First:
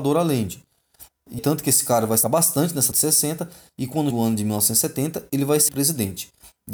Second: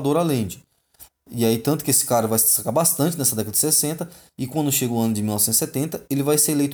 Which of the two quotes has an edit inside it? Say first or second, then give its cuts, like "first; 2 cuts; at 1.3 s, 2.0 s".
first; 5 cuts; at 1.4 s, 2.2 s, 2.9 s, 4.1 s, 5.7 s